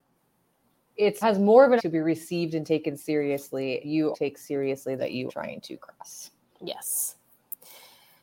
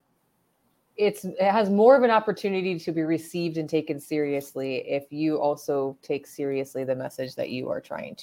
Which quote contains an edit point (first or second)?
first